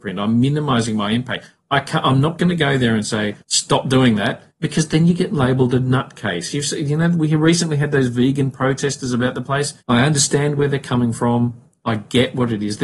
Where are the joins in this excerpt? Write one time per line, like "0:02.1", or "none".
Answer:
0:03.4
0:04.5
0:09.8